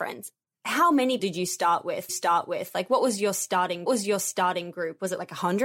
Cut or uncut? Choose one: cut